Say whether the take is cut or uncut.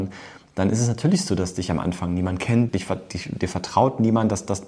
cut